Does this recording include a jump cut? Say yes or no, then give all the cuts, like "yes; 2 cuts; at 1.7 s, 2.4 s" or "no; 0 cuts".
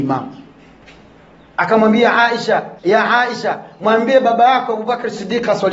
yes; 1 cut; at 2.8 s